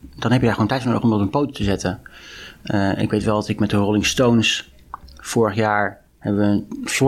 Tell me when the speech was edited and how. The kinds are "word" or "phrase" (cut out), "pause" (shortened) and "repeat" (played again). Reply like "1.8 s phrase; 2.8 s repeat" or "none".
6.1 s pause